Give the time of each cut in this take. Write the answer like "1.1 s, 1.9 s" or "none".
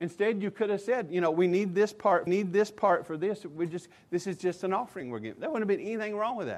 2.3 s